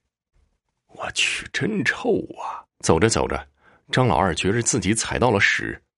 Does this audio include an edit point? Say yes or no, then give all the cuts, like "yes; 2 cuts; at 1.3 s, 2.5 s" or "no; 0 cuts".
yes; 1 cut; at 2.7 s